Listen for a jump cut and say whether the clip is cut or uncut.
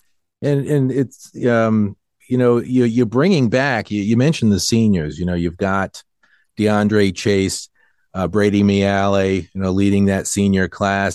uncut